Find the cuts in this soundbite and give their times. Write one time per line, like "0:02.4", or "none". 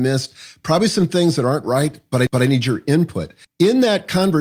0:01.6
0:02.3
0:03.4